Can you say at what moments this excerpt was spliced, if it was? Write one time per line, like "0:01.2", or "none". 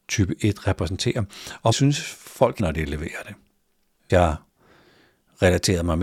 0:01.7
0:02.6
0:04.1